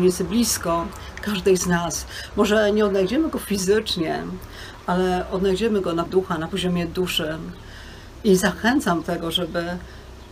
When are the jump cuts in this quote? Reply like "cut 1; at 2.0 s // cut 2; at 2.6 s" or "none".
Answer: cut 1; at 6.1 s // cut 2; at 9.0 s